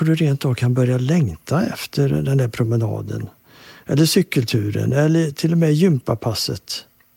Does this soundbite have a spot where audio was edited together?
no; 0 cuts

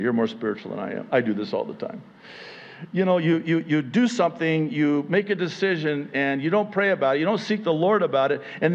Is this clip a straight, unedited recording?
yes; 0 cuts

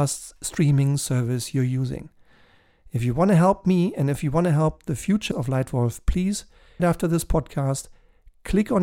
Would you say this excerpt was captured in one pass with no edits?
no; 2 cuts; at 5.3 s, 6.8 s

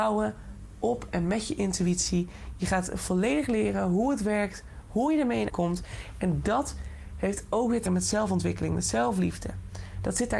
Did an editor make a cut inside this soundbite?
yes; 2 cuts; at 5.5 s, 7.9 s

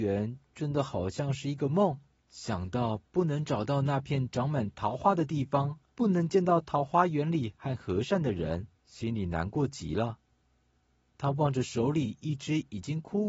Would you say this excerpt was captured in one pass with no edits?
no; 4 cuts; at 2.2 s, 5.9 s, 8.8 s, 10.8 s

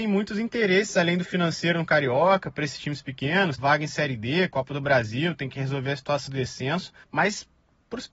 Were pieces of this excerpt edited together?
yes; 3 cuts; at 3.6 s, 6.3 s, 7.0 s

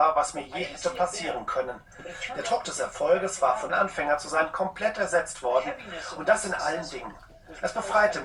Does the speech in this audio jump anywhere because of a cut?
yes; 1 cut; at 3.7 s

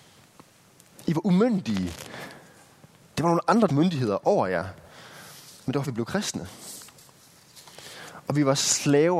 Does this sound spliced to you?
yes; 2 cuts; at 3.7 s, 5.8 s

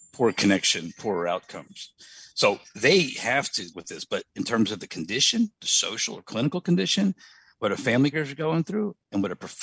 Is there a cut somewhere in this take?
yes; 3 cuts; at 1.0 s, 3.7 s, 8.1 s

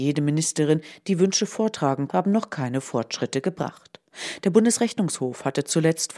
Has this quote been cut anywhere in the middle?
yes; 1 cut; at 2.1 s

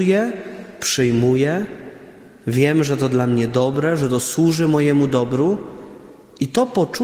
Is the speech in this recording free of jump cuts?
yes; 0 cuts

